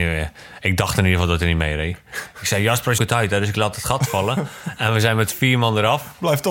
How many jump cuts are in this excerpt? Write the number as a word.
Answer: one